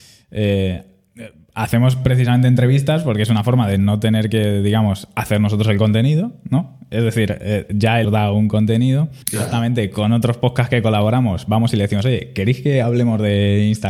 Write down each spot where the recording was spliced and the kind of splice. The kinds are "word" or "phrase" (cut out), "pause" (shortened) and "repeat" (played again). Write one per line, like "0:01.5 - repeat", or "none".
0:08.0 - phrase
0:09.2 - pause